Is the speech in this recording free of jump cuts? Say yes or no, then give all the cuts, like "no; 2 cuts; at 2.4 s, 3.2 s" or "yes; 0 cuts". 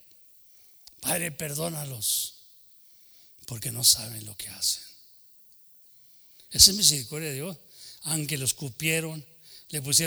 yes; 0 cuts